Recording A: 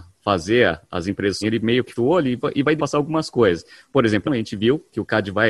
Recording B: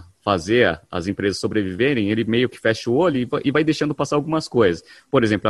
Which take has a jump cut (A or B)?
A